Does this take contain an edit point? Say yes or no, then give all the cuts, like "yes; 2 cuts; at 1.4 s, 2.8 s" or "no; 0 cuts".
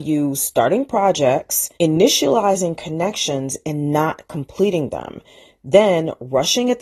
yes; 1 cut; at 1.7 s